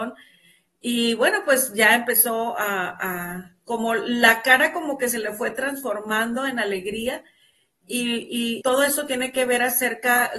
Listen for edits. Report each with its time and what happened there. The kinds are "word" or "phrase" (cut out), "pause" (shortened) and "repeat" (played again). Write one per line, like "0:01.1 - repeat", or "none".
0:08.6 - phrase